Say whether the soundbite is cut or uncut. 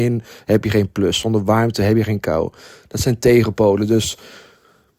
uncut